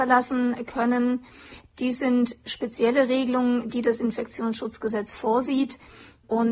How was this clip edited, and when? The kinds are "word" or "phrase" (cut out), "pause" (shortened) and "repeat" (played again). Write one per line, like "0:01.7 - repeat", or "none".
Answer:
none

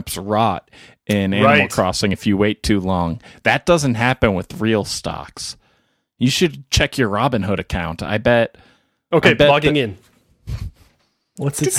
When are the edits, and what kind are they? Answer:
none

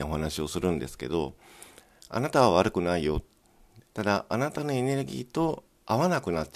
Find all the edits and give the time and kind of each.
0:03.9 - pause

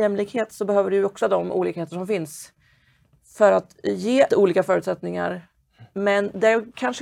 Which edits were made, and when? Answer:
0:01.2 - word
0:04.3 - word

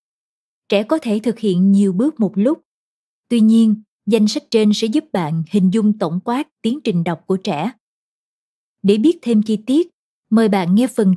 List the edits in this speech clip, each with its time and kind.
none

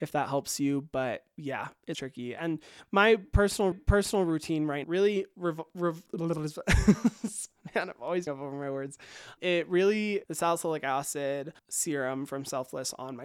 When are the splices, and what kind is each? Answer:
0:01.9 - word
0:03.7 - repeat
0:04.8 - phrase
0:08.3 - word
0:09.4 - word
0:10.2 - phrase
0:11.6 - pause

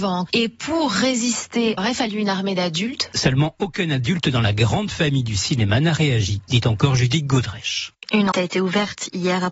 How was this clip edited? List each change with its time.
0:01.8 - phrase
0:08.3 - word

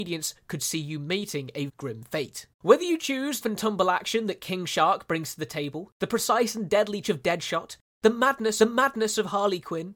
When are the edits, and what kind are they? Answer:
0:01.7 - word
0:02.5 - pause
0:03.4 - phrase
0:07.0 - word
0:08.6 - repeat

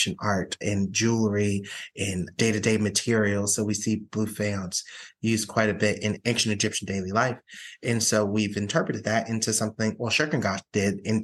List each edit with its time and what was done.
none

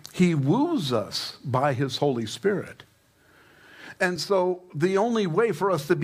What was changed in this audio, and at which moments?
none

